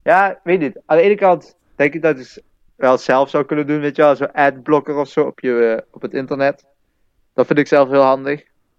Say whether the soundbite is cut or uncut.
uncut